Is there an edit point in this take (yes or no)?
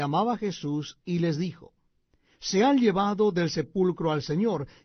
no